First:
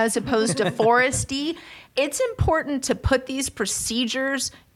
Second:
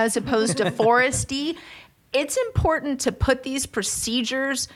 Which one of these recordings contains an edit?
first; 1 cut; at 1.9 s

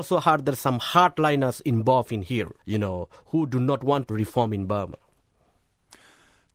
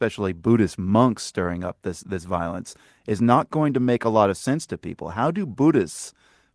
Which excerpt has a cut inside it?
first; 2 cuts; at 2.6 s, 4.1 s

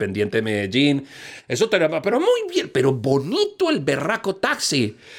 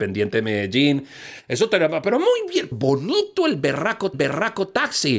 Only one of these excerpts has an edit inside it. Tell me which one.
second; 2 cuts; at 2.7 s, 4.1 s

